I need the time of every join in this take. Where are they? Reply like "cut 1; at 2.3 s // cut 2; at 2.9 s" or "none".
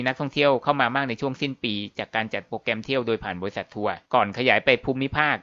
cut 1; at 4.0 s

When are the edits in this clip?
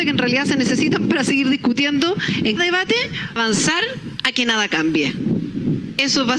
cut 1; at 2.6 s // cut 2; at 3.4 s

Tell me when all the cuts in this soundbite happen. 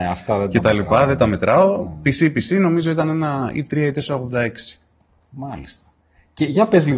none

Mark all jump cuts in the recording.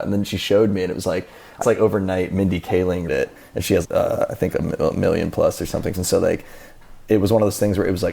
cut 1; at 1.6 s // cut 2; at 3.1 s // cut 3; at 3.8 s // cut 4; at 4.5 s // cut 5; at 5.9 s

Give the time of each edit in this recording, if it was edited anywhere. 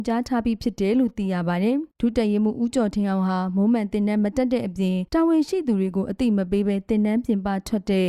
cut 1; at 1.9 s // cut 2; at 5.1 s

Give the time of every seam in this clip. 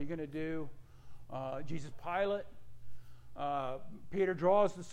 cut 1; at 1.9 s

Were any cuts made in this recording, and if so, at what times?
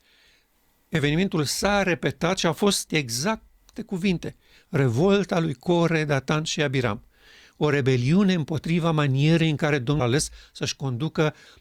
cut 1; at 2.9 s // cut 2; at 3.7 s // cut 3; at 10.0 s

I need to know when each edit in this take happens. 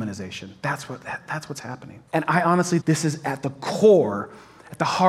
cut 1; at 2.1 s // cut 2; at 2.8 s

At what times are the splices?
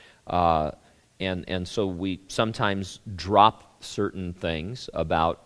none

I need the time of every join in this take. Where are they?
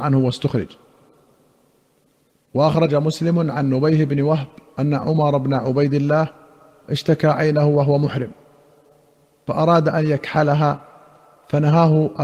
none

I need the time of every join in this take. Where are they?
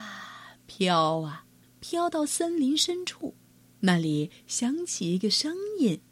cut 1; at 1.6 s // cut 2; at 3.5 s

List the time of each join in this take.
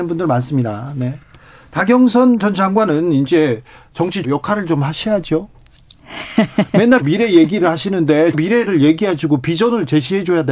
cut 1; at 4.2 s // cut 2; at 7.0 s // cut 3; at 8.3 s

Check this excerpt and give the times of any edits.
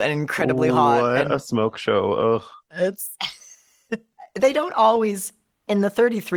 none

